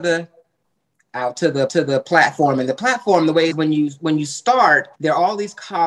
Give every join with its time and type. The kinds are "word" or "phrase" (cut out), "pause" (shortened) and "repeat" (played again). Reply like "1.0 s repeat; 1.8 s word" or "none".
1.7 s repeat; 3.5 s phrase; 4.9 s pause